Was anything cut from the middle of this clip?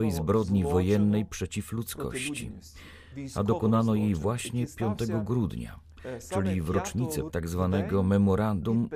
yes; 1 cut; at 7.3 s

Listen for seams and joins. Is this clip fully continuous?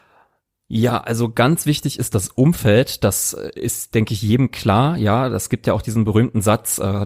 yes; 0 cuts

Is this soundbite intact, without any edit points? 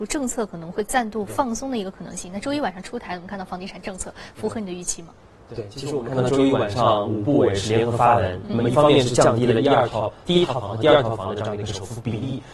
yes; 0 cuts

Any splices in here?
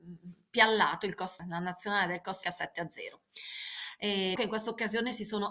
yes; 3 cuts; at 1.4 s, 2.4 s, 4.4 s

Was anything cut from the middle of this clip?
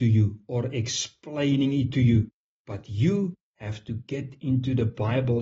no; 0 cuts

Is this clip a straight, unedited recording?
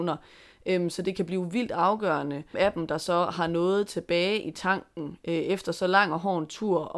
no; 1 cut; at 2.5 s

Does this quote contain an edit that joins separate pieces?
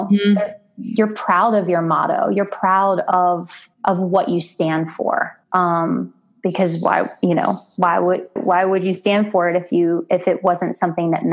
yes; 3 cuts; at 3.7 s, 5.4 s, 8.4 s

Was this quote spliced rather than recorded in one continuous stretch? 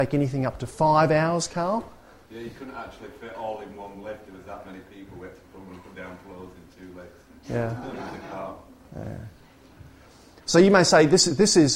no; 0 cuts

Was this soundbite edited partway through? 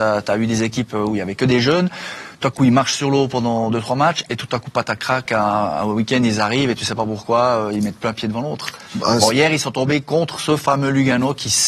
yes; 1 cut; at 5.3 s

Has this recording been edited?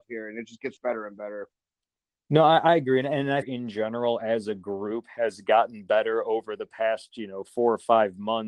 yes; 1 cut; at 3.4 s

